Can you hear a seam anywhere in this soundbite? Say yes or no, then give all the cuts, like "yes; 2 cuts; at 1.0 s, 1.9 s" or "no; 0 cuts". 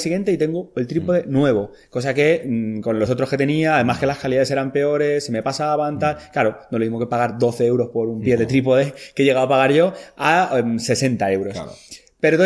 no; 0 cuts